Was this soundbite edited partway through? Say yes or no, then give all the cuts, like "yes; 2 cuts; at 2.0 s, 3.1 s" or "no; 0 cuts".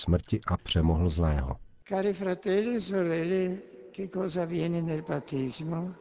no; 0 cuts